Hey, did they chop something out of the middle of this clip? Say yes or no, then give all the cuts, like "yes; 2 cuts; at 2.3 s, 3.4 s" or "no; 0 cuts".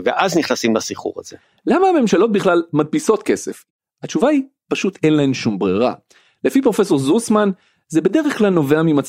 no; 0 cuts